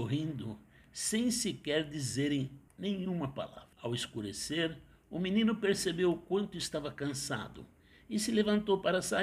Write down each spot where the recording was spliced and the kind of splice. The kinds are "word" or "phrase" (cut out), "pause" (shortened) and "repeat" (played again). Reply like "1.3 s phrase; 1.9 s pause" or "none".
2.7 s pause; 3.7 s pause